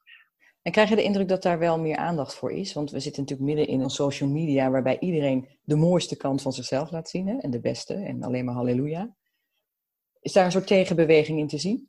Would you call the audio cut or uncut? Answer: cut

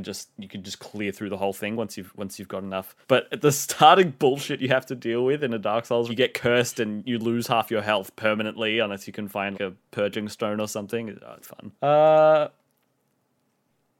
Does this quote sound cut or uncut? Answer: cut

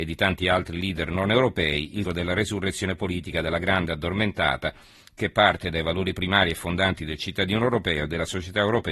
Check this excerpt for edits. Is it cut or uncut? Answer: cut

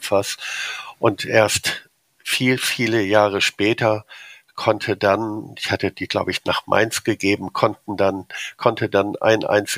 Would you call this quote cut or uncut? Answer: uncut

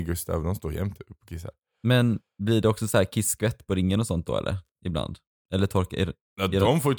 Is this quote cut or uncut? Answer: uncut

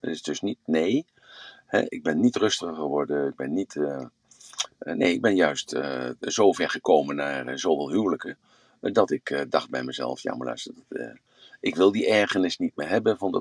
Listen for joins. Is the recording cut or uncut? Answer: uncut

